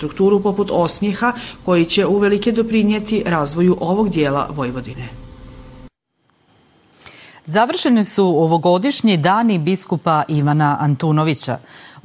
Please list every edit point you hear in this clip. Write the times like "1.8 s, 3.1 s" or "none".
none